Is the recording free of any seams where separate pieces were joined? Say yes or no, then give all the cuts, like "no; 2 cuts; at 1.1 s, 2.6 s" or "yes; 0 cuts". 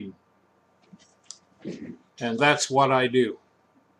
no; 1 cut; at 2.4 s